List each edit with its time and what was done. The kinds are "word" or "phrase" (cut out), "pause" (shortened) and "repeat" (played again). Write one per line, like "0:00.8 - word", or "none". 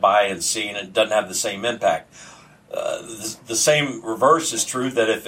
none